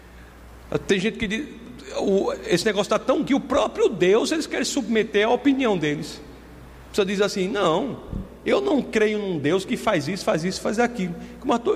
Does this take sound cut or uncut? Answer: cut